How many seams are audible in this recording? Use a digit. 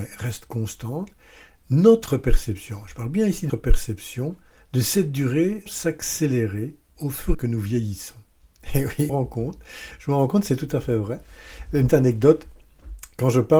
6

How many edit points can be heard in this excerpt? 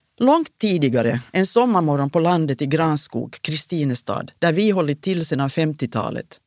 2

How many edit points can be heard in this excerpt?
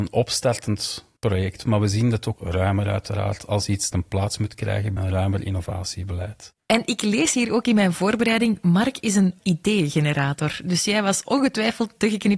5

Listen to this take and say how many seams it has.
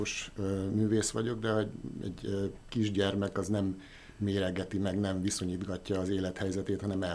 0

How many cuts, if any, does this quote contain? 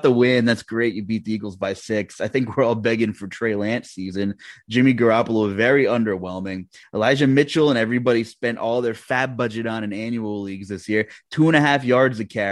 0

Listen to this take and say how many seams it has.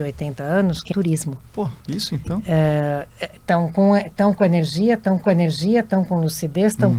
3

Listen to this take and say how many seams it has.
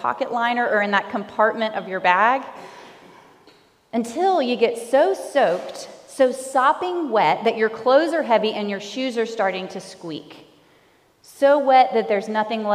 0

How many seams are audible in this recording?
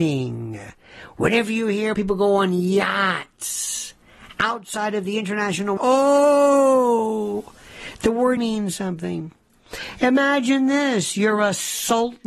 3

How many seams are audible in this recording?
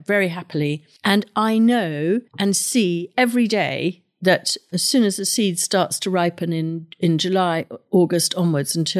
2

